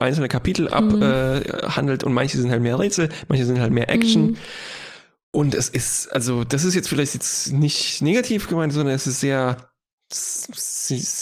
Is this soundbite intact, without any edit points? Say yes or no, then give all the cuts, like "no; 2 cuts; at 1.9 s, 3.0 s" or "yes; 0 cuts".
yes; 0 cuts